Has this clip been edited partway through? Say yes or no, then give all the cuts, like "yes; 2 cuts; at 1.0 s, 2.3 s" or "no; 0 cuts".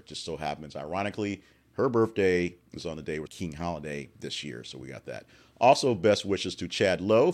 yes; 2 cuts; at 3.3 s, 4.1 s